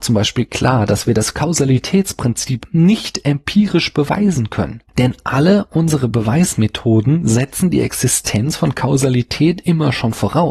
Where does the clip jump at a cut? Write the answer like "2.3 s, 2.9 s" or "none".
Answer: none